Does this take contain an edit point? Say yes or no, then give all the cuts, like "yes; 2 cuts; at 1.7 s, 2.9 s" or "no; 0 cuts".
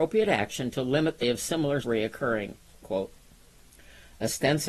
yes; 3 cuts; at 1.2 s, 1.8 s, 2.8 s